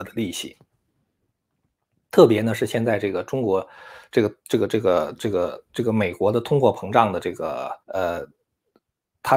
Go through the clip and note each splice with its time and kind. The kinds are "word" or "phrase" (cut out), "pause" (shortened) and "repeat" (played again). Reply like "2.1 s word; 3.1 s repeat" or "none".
5.7 s pause; 7.8 s pause